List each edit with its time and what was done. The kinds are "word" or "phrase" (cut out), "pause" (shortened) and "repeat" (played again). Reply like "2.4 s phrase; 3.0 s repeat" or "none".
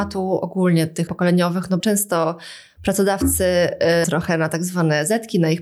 1.1 s word; 1.8 s word; 4.0 s word